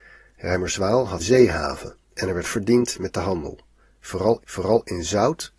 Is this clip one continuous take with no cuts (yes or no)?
no